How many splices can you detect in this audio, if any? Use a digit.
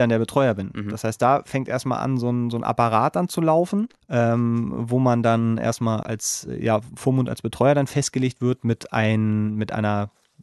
2